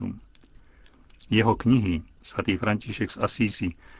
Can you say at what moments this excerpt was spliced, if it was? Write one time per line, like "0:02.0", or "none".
0:02.2